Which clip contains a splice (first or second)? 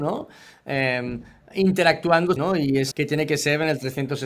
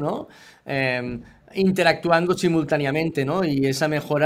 first